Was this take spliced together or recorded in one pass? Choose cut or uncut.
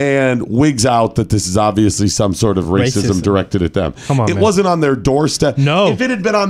uncut